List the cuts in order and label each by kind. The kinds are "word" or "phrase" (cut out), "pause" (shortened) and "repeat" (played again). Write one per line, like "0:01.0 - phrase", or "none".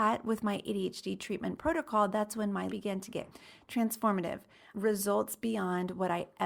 0:02.7 - word